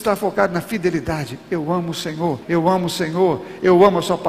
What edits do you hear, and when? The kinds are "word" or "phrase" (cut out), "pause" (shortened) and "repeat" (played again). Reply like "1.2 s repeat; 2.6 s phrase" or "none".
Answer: 2.4 s pause